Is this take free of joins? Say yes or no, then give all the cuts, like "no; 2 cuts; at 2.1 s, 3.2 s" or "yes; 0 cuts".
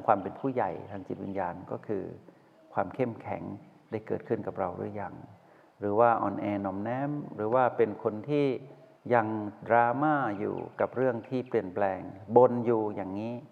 yes; 0 cuts